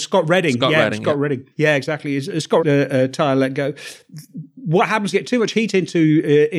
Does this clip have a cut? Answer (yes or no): yes